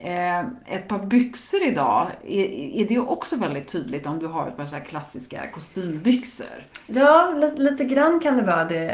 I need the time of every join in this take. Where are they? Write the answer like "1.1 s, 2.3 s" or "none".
none